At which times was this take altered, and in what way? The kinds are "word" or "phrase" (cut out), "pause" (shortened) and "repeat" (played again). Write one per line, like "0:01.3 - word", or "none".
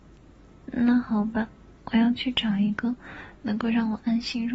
0:01.8 - pause

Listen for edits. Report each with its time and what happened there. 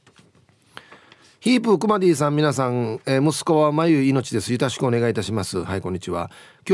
none

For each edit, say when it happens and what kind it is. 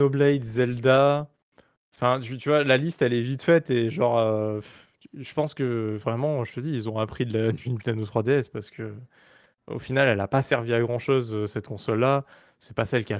none

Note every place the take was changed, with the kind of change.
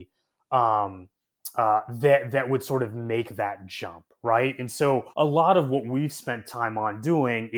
0:05.1 - pause

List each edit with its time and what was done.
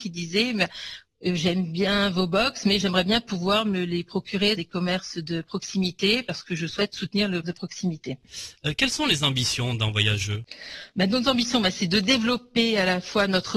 0:04.6 - word
0:07.4 - word

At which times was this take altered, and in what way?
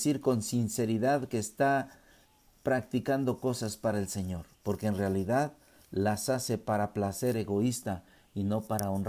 0:04.5 - pause

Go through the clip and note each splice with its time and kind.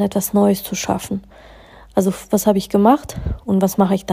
none

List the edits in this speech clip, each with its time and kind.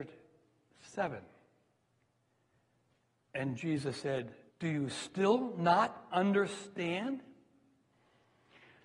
0:04.5 - pause

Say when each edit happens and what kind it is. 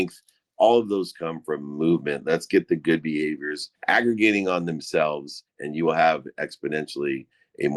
0:03.8 - pause
0:05.5 - pause

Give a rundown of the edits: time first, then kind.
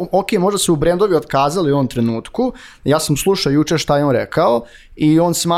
none

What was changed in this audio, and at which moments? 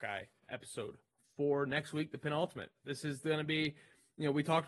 none

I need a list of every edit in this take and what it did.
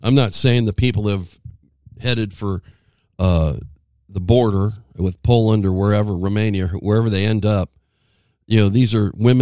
none

